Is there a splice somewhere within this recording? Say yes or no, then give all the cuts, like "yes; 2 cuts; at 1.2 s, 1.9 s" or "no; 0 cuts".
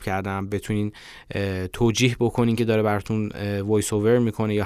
yes; 1 cut; at 2.6 s